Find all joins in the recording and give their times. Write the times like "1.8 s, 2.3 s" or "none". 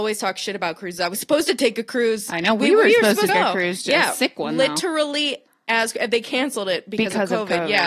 3.3 s